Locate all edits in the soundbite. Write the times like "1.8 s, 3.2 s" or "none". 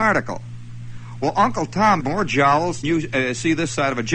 2.0 s, 2.8 s